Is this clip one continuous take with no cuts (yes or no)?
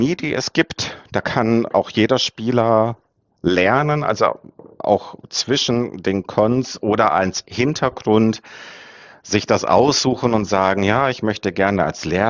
yes